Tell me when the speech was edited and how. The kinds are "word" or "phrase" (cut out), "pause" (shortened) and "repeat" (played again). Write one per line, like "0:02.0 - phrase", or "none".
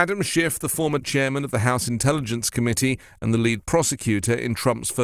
0:01.0 - word